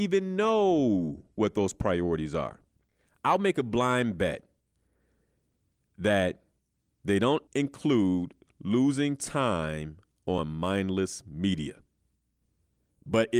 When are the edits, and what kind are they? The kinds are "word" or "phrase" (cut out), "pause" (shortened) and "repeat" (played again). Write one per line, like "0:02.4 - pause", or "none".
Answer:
0:02.7 - pause
0:07.5 - pause